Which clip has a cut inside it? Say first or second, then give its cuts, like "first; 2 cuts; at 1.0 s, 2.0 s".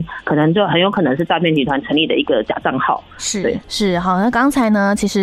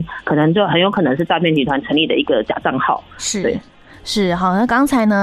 first; 1 cut; at 3.6 s